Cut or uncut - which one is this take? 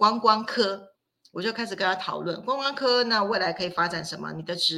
cut